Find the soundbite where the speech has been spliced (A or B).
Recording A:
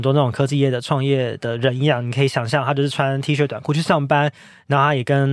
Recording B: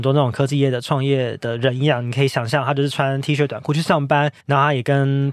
B